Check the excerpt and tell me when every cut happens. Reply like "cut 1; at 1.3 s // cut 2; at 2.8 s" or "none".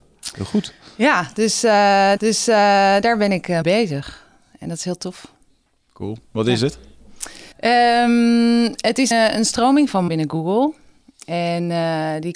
cut 1; at 2.2 s // cut 2; at 3.6 s // cut 3; at 7.5 s // cut 4; at 9.1 s // cut 5; at 10.1 s